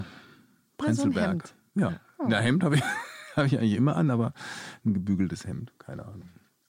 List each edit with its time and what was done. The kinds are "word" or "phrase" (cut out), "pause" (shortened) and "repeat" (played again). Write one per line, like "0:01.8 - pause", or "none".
none